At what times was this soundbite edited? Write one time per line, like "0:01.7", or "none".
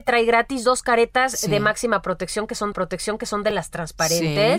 0:02.7